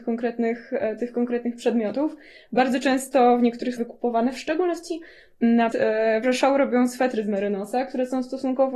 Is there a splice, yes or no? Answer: yes